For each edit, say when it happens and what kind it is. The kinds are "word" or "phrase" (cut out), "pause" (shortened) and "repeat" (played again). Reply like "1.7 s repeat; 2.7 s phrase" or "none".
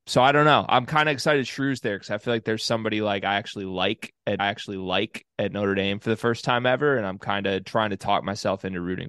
4.4 s repeat